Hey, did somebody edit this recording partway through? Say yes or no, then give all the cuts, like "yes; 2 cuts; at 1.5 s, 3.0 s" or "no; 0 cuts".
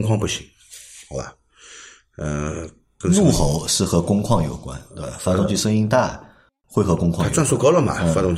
no; 0 cuts